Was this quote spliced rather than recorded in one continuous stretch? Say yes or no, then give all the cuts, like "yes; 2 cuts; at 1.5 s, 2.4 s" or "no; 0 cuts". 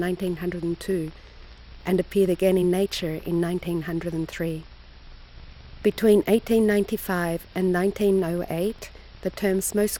no; 0 cuts